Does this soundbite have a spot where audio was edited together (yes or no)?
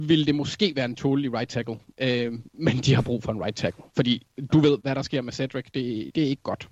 yes